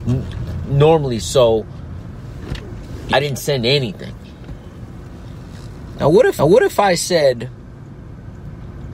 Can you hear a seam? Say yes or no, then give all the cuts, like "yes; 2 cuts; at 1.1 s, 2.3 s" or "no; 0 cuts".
yes; 3 cuts; at 1.2 s, 3.1 s, 6.4 s